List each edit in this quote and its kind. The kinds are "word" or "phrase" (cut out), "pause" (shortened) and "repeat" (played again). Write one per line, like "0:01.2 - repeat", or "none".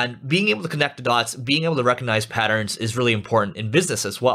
none